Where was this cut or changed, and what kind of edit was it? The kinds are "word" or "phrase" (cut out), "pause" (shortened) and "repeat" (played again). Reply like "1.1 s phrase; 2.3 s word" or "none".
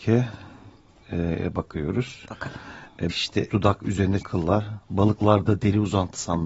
3.1 s word; 3.5 s word; 4.2 s word